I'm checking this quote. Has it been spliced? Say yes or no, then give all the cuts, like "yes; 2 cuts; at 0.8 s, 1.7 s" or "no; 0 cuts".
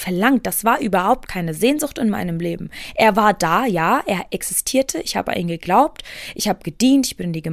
no; 0 cuts